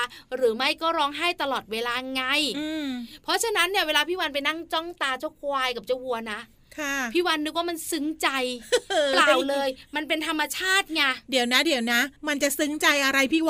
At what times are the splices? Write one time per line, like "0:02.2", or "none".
0:12.2